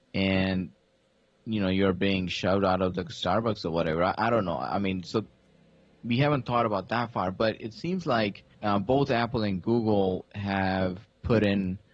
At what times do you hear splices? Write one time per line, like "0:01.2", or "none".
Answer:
0:08.5